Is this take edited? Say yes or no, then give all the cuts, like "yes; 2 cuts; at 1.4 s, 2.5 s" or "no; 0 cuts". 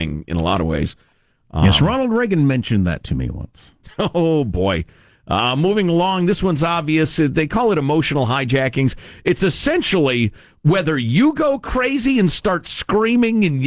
no; 0 cuts